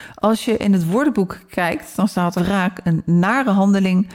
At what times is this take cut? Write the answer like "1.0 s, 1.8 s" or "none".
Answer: 2.4 s